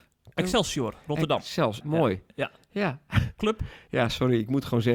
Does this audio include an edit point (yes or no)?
yes